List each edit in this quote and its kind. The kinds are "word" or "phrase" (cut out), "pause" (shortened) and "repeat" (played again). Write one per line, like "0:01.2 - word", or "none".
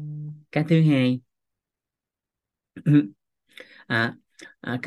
0:03.1 - pause